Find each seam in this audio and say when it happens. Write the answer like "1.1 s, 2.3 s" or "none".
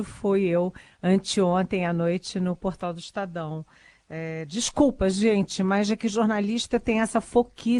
none